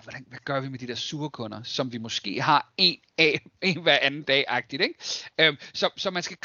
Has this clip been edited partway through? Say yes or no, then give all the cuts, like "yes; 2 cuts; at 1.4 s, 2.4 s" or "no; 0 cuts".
no; 0 cuts